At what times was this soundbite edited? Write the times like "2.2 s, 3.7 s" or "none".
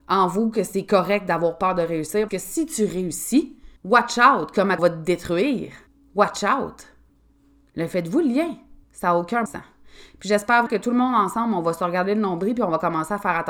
2.3 s, 3.8 s, 4.8 s, 5.9 s, 7.1 s, 8.8 s, 9.5 s, 10.7 s